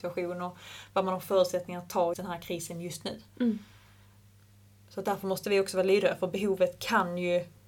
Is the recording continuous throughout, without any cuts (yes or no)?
no